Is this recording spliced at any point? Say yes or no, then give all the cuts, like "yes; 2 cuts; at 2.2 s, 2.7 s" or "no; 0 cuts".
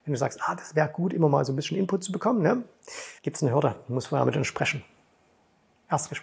yes; 1 cut; at 3.2 s